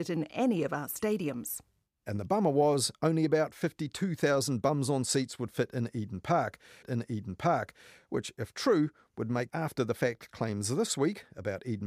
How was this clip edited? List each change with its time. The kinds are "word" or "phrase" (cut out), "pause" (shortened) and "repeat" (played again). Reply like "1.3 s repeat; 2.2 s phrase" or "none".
6.8 s repeat; 9.5 s word